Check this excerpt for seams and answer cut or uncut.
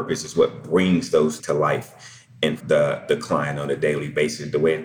cut